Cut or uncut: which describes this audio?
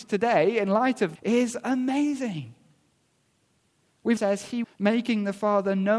cut